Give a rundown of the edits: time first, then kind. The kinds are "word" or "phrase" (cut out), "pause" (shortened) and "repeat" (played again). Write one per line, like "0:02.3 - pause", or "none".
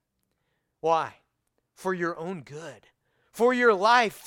none